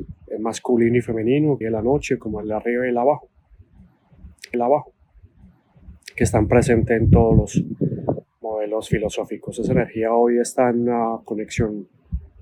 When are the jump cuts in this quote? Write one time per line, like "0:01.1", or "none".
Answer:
0:01.6
0:04.5